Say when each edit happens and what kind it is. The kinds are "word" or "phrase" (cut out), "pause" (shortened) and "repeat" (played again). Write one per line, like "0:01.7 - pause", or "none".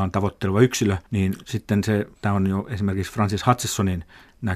0:01.1 - pause
0:02.2 - pause